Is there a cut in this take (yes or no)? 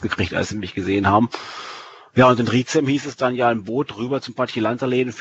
no